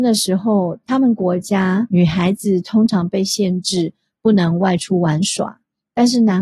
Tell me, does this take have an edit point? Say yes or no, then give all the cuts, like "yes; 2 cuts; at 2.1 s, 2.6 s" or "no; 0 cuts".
no; 0 cuts